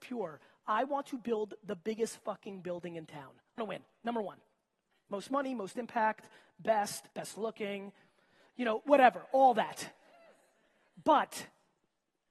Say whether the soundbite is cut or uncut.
cut